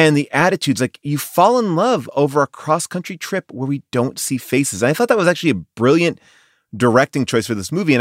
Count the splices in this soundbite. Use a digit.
0